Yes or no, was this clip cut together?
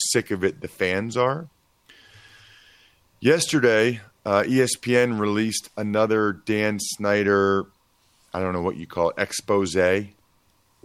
no